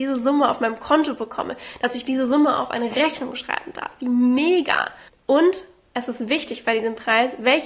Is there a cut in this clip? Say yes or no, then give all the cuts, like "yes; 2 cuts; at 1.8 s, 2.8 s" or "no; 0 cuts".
no; 0 cuts